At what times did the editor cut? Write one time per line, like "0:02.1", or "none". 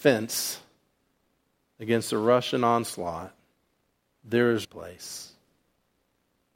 0:03.8
0:04.6